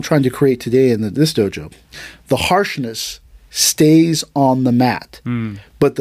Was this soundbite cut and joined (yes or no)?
no